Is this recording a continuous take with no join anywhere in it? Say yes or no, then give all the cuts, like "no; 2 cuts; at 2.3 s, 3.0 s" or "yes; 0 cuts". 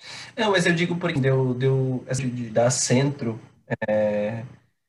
no; 3 cuts; at 1.2 s, 2.2 s, 2.5 s